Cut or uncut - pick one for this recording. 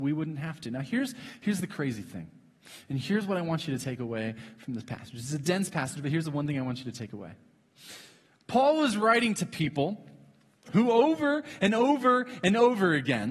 uncut